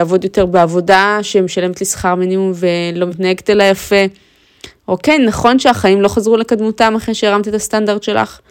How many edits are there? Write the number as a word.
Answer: zero